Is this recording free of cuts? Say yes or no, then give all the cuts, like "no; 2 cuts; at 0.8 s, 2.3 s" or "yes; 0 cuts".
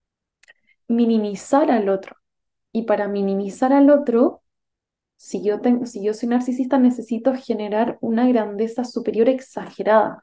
yes; 0 cuts